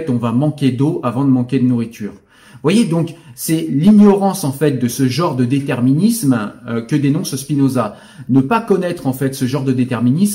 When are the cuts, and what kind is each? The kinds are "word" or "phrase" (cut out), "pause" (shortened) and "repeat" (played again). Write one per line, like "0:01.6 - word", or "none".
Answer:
none